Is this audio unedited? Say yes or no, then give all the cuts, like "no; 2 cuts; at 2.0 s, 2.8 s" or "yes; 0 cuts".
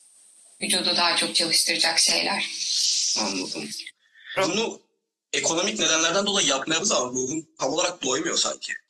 no; 1 cut; at 6.8 s